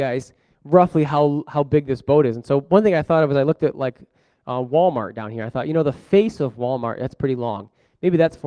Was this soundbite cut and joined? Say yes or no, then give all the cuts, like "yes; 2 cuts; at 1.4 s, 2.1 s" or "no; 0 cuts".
no; 0 cuts